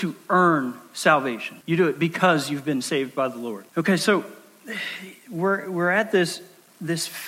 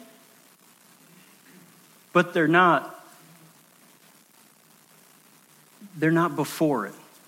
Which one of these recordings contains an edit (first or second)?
first